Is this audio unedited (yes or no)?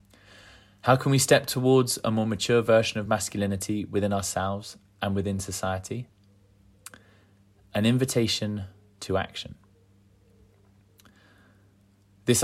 yes